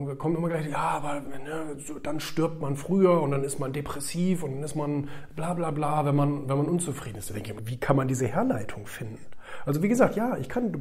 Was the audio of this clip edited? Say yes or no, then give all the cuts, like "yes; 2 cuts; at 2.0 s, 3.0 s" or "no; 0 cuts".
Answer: yes; 1 cut; at 7.6 s